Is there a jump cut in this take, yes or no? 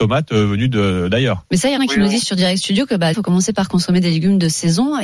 yes